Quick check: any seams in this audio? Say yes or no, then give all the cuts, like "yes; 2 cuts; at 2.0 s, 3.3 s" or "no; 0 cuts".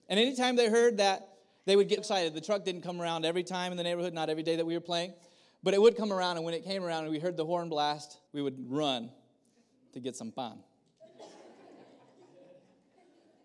yes; 2 cuts; at 2.0 s, 8.3 s